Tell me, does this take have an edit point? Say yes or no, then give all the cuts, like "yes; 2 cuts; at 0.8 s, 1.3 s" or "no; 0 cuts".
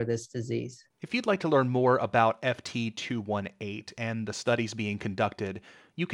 yes; 1 cut; at 0.9 s